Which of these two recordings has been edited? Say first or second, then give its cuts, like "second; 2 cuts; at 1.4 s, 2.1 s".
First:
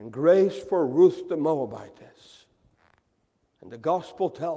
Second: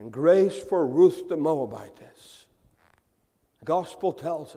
second; 1 cut; at 3.6 s